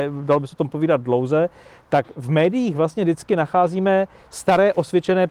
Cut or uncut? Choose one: uncut